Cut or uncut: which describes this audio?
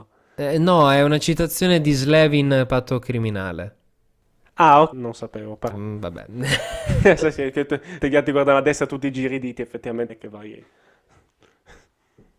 cut